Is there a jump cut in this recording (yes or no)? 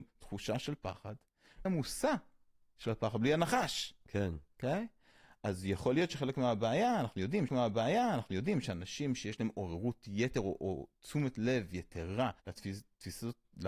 yes